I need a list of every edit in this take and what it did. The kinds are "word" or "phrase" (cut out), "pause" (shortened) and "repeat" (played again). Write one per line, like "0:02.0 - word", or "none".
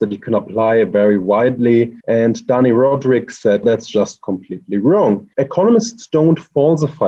0:02.0 - pause
0:03.6 - word
0:05.3 - pause